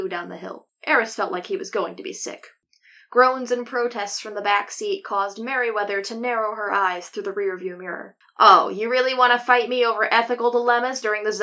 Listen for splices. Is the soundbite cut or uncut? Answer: uncut